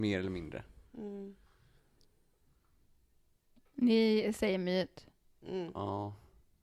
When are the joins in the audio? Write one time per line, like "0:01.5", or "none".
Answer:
none